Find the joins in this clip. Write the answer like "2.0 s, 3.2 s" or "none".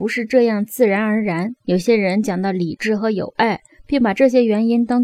1.6 s